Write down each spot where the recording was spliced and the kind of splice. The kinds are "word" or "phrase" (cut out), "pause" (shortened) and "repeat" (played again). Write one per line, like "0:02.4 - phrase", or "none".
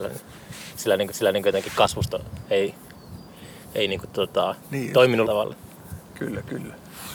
0:01.1 - repeat
0:04.6 - pause
0:05.2 - word